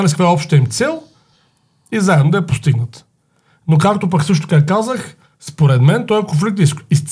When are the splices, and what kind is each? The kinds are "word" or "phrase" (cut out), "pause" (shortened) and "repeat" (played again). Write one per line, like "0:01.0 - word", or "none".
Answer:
none